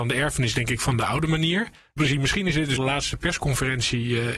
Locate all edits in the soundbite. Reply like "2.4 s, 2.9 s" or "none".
2.0 s, 2.8 s

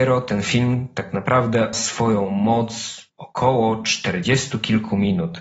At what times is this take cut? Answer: 1.7 s, 3.1 s

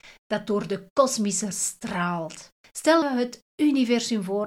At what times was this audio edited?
1.5 s, 3.0 s

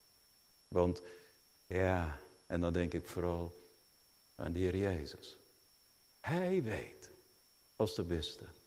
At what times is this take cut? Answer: none

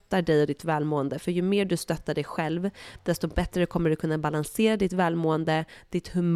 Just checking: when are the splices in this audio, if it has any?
none

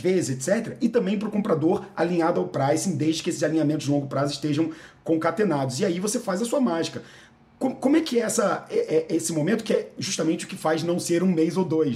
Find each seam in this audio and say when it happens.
none

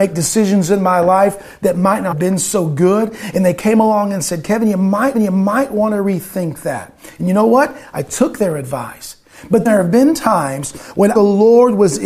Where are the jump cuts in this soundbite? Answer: 2.1 s, 5.1 s, 9.7 s, 11.2 s

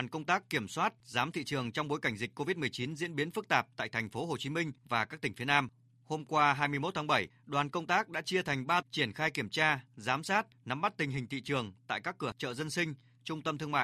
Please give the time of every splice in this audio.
1.3 s, 8.8 s, 12.3 s

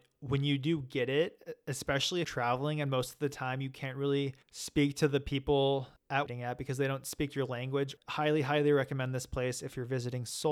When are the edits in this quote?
2.2 s, 4.4 s, 6.3 s

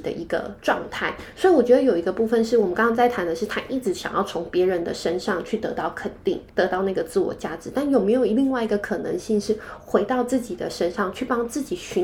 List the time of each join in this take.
6.5 s

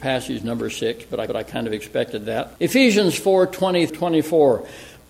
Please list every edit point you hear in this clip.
1.3 s, 2.6 s, 3.9 s

